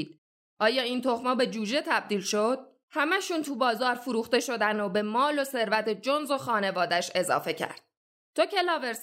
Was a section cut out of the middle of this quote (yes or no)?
no